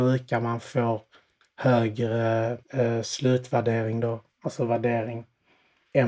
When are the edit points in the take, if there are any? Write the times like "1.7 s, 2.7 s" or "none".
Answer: 2.6 s